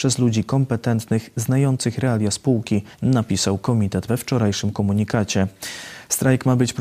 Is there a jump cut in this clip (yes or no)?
yes